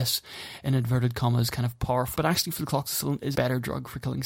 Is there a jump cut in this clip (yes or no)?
yes